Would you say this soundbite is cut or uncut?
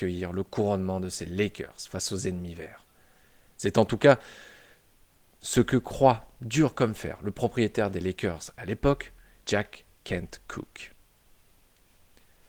uncut